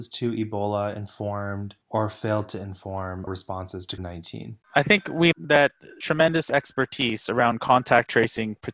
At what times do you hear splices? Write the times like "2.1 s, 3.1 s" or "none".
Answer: 1.8 s, 3.3 s, 4.0 s, 4.6 s, 5.3 s, 6.0 s